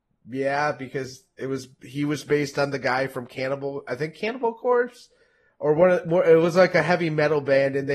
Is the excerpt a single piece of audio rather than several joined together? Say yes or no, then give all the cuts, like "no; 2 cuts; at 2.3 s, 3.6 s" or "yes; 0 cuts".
yes; 0 cuts